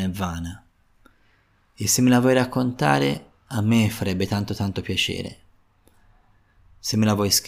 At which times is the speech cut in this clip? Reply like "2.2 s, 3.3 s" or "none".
none